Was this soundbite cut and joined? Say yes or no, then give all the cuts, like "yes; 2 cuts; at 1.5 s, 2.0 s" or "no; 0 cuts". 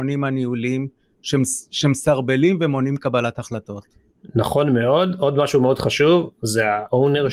no; 0 cuts